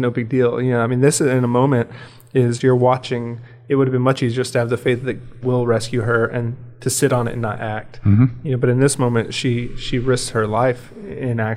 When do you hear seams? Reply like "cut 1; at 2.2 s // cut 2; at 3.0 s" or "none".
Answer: cut 1; at 5.4 s

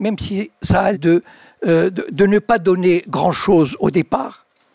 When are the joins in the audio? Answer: cut 1; at 0.9 s

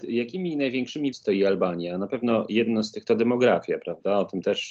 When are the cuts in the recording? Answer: cut 1; at 1.1 s // cut 2; at 3.0 s

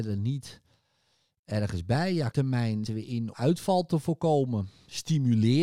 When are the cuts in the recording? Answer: cut 1; at 2.3 s // cut 2; at 2.9 s // cut 3; at 3.3 s

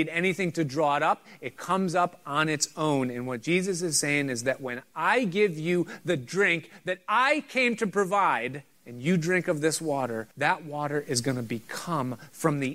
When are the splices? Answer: cut 1; at 8.7 s // cut 2; at 10.3 s

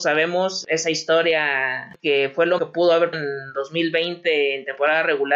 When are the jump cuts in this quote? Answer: cut 1; at 1.9 s // cut 2; at 2.6 s // cut 3; at 3.1 s

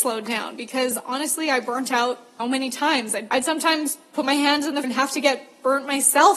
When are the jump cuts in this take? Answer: cut 1; at 2.4 s // cut 2; at 4.8 s

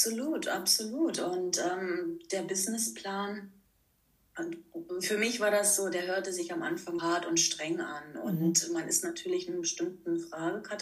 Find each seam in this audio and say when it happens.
cut 1; at 7.0 s

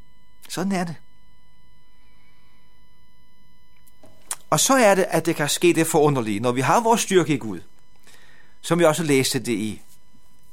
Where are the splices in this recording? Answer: none

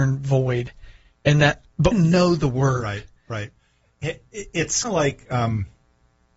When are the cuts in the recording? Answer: cut 1; at 1.9 s // cut 2; at 4.8 s

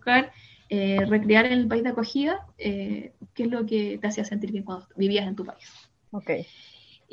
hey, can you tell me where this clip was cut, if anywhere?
none

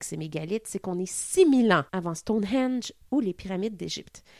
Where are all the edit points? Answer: cut 1; at 1.9 s

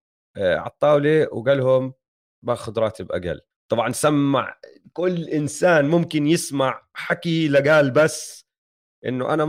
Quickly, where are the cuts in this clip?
cut 1; at 3.5 s

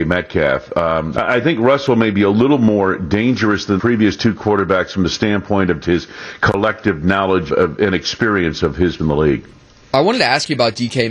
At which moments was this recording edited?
cut 1; at 1.1 s // cut 2; at 3.8 s // cut 3; at 5.8 s // cut 4; at 7.5 s // cut 5; at 9.0 s

